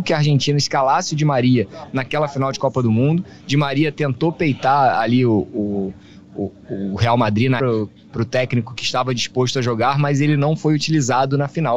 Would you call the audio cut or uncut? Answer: cut